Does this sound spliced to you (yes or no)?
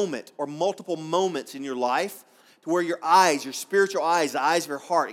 no